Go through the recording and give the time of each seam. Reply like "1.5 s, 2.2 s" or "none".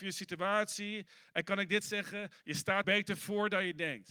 2.8 s